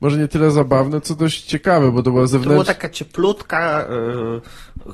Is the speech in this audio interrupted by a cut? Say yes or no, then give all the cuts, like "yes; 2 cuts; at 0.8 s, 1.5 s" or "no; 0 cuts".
no; 0 cuts